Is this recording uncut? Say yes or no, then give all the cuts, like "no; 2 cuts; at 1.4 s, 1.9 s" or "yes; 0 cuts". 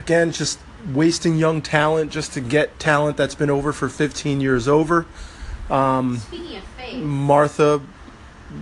yes; 0 cuts